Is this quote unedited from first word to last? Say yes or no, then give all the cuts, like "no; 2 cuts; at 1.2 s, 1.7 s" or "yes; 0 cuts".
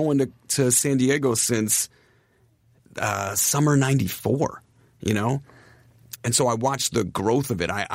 no; 1 cut; at 6.2 s